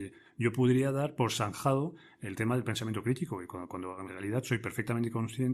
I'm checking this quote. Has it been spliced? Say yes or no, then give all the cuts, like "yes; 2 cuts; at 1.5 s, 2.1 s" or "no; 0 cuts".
no; 0 cuts